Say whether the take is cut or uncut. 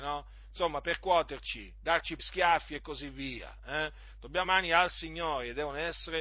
cut